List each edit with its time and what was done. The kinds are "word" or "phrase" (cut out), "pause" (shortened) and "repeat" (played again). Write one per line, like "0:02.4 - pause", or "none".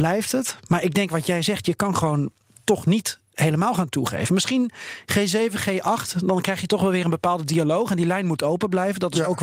none

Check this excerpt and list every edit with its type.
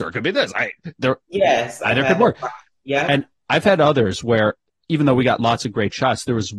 none

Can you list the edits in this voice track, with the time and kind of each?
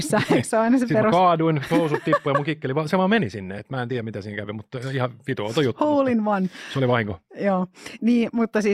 none

